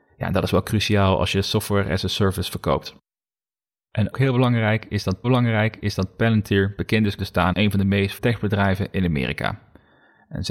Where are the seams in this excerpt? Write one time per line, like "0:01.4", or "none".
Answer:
0:04.1
0:05.2
0:07.2
0:07.5
0:08.2